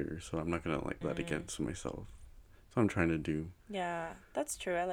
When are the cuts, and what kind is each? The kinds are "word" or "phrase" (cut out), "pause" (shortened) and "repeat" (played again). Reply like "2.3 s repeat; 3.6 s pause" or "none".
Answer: 1.0 s word